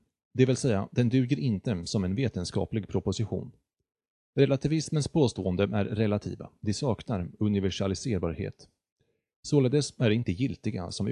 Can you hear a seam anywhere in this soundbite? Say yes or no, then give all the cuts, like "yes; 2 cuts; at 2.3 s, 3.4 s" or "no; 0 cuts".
no; 0 cuts